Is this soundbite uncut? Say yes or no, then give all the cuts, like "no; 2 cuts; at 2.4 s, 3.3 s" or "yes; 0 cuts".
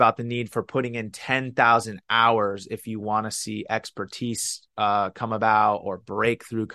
yes; 0 cuts